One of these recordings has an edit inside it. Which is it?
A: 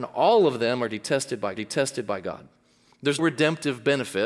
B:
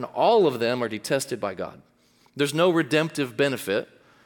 A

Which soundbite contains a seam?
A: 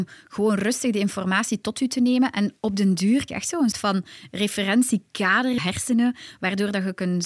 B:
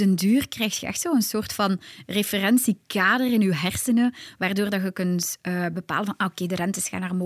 A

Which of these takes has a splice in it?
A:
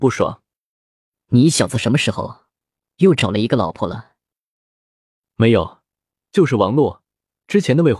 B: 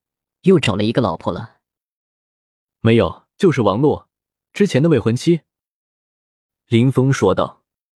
B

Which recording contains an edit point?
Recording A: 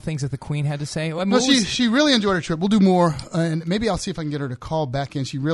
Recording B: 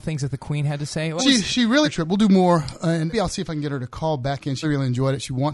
B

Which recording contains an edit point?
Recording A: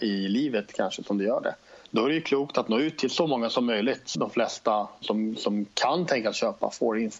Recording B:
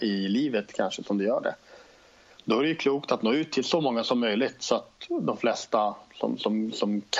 A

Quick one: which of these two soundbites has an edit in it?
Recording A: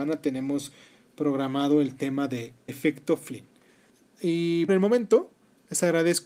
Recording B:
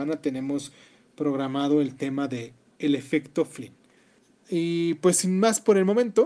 A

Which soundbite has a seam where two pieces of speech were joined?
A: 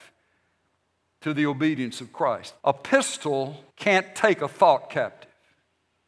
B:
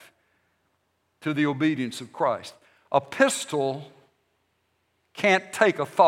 A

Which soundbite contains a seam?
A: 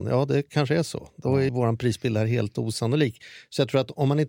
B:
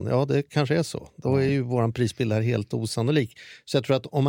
A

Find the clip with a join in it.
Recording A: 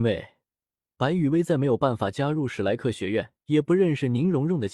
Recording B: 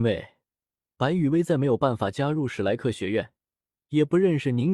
A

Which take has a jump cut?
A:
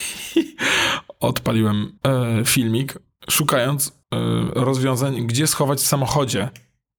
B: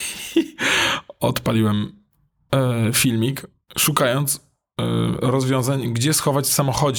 A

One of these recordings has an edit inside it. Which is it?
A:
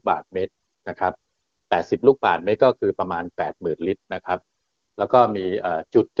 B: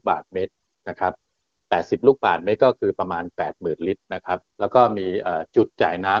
B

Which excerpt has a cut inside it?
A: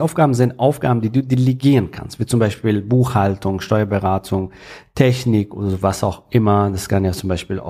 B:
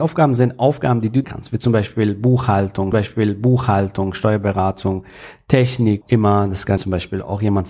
B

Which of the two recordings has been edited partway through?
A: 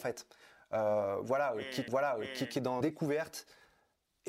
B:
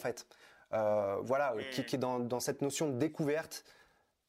A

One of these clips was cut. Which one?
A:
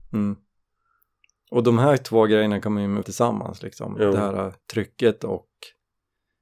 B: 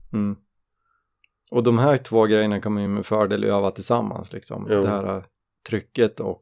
A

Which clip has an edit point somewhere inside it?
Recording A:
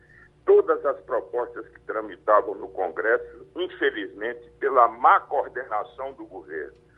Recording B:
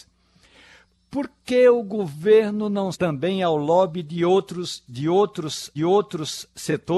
B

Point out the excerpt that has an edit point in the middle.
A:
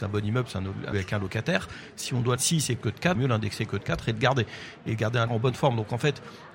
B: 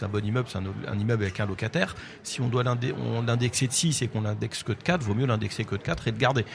A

